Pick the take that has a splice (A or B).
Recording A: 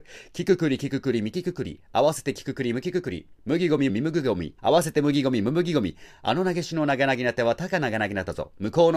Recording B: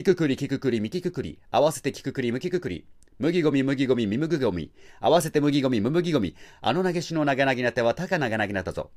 A